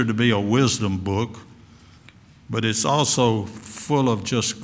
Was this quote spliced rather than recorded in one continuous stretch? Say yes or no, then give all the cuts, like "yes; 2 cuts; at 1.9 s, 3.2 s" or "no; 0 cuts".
no; 0 cuts